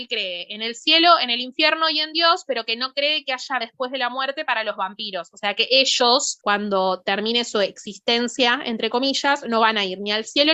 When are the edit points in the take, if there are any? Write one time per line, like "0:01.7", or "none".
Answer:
0:03.6